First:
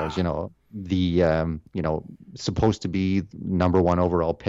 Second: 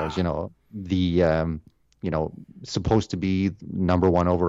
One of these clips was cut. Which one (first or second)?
first